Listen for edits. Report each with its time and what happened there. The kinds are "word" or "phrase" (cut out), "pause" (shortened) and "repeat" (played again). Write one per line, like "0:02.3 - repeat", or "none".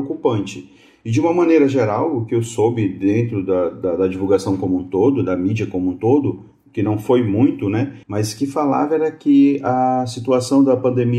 0:08.0 - pause

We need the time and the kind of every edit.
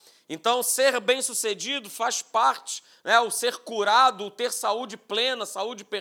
none

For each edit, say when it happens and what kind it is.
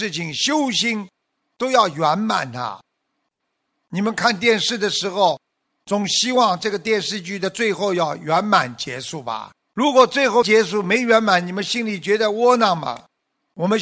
0:09.6 - pause

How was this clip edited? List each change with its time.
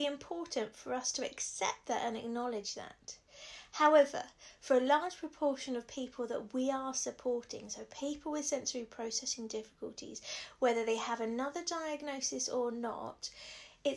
none

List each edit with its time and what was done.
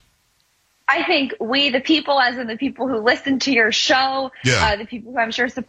none

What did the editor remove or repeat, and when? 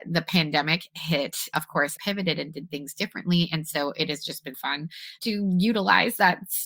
0:01.5 - word
0:02.0 - word
0:04.5 - word
0:05.2 - word

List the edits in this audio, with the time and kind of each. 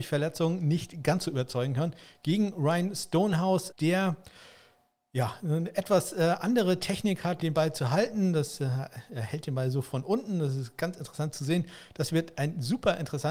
0:03.7 - word
0:07.4 - word

